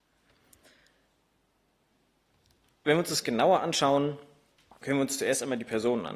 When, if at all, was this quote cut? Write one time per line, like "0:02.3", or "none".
0:03.2
0:04.8